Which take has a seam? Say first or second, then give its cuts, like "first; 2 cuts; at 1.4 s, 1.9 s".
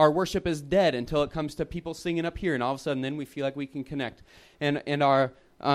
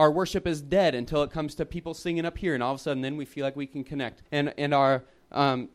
second; 1 cut; at 4.3 s